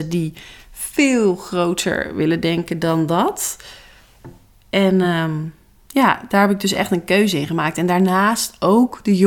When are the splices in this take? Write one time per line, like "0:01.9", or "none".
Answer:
none